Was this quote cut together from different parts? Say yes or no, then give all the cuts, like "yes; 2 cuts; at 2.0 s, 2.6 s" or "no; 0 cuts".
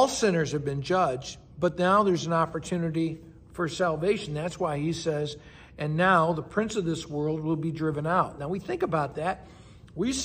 no; 0 cuts